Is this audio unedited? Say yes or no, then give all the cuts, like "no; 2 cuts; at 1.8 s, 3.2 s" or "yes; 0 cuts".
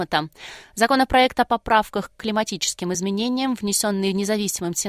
yes; 0 cuts